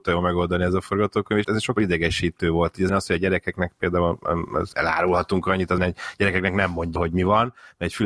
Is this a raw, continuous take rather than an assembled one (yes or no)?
no